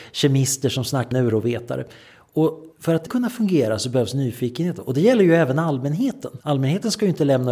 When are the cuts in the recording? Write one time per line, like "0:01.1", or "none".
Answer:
0:01.1
0:02.7
0:03.1
0:06.4